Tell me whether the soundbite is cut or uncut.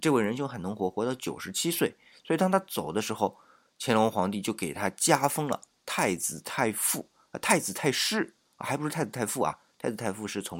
uncut